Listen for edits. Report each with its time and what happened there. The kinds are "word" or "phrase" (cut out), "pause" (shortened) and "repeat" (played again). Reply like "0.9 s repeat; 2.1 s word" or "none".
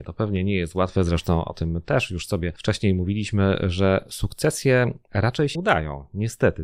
5.5 s word